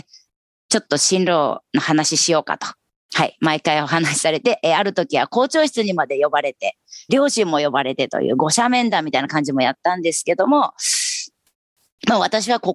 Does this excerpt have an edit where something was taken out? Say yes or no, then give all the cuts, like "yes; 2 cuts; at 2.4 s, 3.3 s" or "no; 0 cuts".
yes; 1 cut; at 7.1 s